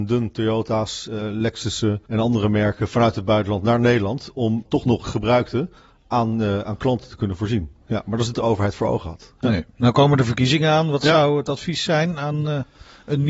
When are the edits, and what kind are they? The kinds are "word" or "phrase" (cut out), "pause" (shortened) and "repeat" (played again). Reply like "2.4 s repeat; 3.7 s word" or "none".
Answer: 2.1 s pause; 4.7 s word; 5.0 s phrase; 8.3 s phrase